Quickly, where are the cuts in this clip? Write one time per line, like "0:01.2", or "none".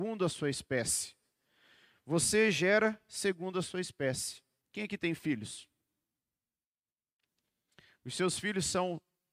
0:04.6